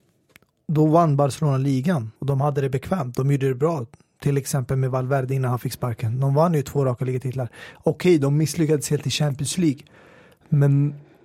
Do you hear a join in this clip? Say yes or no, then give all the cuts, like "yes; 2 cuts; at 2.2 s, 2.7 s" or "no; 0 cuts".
yes; 1 cut; at 2.2 s